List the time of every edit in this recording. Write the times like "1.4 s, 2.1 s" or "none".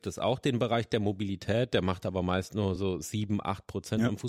none